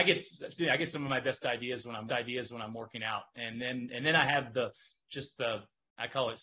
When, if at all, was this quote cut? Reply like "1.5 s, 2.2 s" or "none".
2.1 s